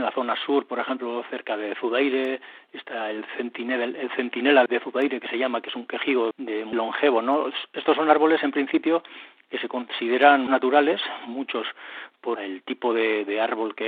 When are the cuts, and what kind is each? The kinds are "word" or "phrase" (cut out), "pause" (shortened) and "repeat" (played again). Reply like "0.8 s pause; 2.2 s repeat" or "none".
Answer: 4.7 s word; 6.3 s word; 6.7 s word; 10.5 s word; 12.4 s word